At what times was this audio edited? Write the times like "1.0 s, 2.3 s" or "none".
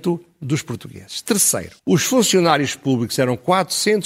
1.8 s